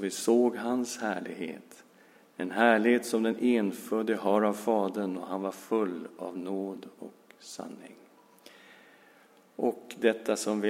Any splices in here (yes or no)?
no